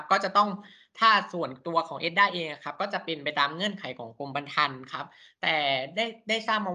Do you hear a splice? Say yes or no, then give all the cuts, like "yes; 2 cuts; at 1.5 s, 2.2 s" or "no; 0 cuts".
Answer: no; 0 cuts